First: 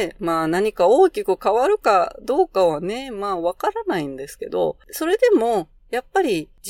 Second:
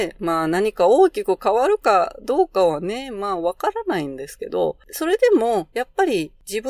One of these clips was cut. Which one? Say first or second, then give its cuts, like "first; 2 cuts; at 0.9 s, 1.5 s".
second; 1 cut; at 5.7 s